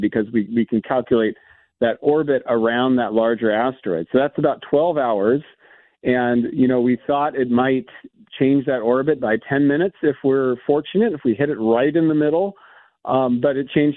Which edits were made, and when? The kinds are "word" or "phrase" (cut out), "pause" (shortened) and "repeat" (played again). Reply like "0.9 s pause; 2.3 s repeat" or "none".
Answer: none